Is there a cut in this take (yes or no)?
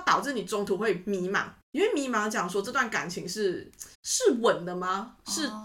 yes